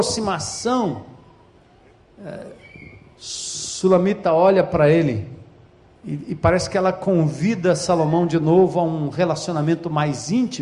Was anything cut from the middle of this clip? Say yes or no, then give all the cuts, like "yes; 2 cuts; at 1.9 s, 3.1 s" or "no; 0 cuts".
no; 0 cuts